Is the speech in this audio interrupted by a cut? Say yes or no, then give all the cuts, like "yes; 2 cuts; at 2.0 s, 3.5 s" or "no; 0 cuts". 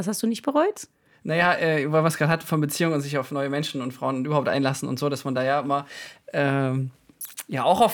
no; 0 cuts